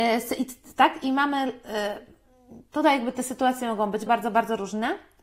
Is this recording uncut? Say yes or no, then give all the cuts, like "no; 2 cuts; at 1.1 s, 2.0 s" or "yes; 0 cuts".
no; 1 cut; at 4.1 s